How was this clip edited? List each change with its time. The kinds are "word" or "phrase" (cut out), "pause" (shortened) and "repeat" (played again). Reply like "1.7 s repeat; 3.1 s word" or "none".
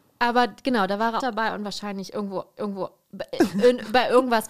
1.2 s word; 2.6 s repeat